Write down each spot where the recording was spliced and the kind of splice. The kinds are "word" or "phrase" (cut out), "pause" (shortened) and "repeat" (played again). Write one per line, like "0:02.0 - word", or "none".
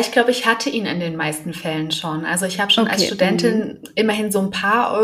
none